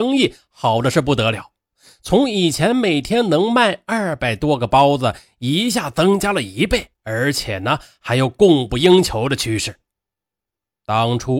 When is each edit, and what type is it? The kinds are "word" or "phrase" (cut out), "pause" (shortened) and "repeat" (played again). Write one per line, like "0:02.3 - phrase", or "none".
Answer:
0:06.9 - pause